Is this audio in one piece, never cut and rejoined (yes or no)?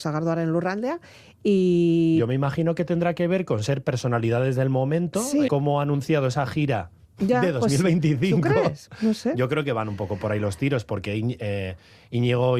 no